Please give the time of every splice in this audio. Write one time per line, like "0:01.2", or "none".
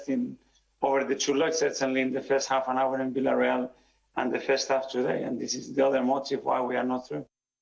none